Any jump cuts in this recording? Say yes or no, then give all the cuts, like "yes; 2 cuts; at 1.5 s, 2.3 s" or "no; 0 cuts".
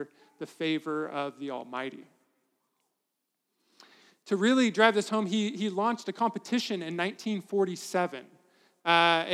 no; 0 cuts